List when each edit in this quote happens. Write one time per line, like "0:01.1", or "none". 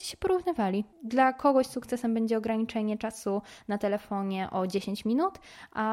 0:00.9